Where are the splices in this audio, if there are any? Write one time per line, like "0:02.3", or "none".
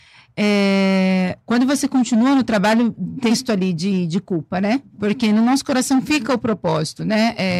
0:01.4
0:03.3
0:04.9